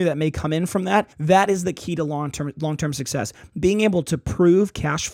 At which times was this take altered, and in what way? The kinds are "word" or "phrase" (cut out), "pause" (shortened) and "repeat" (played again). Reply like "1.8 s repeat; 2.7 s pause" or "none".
1.1 s pause